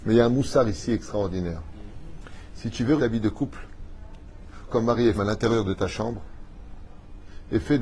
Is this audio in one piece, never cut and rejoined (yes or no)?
no